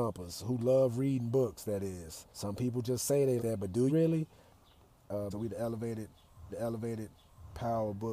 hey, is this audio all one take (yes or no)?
no